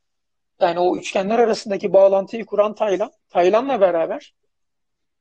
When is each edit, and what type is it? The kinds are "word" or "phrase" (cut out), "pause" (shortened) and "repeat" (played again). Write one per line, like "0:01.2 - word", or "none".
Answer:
0:03.2 - pause